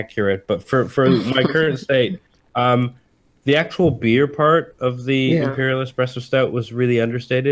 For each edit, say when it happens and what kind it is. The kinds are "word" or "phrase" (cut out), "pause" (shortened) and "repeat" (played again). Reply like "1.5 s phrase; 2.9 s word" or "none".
none